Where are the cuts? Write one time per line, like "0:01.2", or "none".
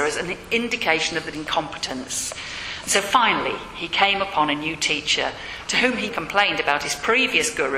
0:01.3
0:06.1